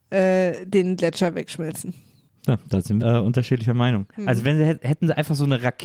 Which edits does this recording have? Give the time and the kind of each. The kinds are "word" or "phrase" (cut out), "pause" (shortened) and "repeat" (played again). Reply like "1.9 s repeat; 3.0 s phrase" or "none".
2.3 s pause; 3.0 s word; 4.1 s pause